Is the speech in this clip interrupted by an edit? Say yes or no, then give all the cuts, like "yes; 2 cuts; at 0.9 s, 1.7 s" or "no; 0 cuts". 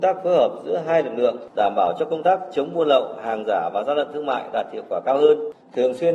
no; 0 cuts